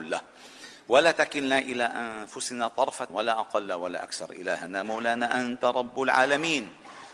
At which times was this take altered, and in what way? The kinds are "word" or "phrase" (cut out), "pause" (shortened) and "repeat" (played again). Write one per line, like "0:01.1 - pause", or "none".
0:03.1 - word